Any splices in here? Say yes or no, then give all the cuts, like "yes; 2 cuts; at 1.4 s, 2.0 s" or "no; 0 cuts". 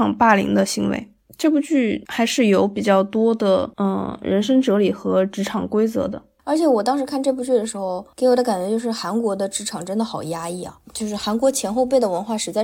no; 0 cuts